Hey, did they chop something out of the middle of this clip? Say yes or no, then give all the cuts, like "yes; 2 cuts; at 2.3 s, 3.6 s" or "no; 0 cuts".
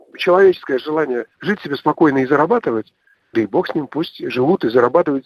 yes; 2 cuts; at 1.3 s, 3.3 s